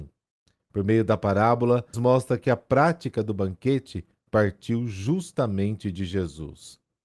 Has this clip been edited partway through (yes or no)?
yes